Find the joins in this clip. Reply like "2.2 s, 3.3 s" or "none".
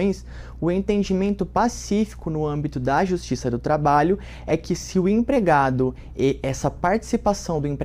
none

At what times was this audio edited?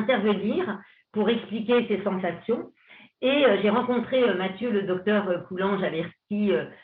none

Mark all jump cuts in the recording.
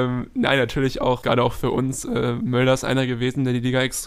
1.2 s

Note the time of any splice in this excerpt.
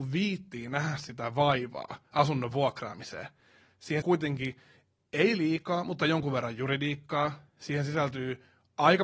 4.0 s

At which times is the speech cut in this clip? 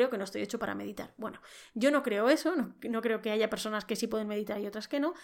none

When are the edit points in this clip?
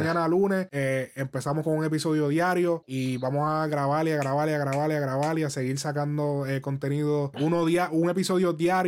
7.3 s

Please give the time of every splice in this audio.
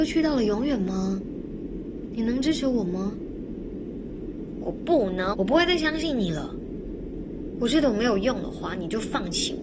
5.3 s

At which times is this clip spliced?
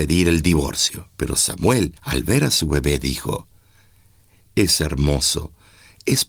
1.1 s, 2.0 s

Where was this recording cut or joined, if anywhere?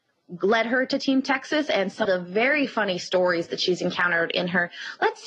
2.0 s

